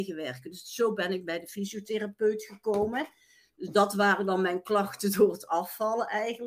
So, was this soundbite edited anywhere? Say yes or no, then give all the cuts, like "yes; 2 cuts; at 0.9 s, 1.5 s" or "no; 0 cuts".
no; 0 cuts